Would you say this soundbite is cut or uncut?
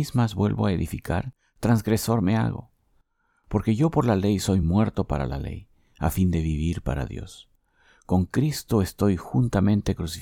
uncut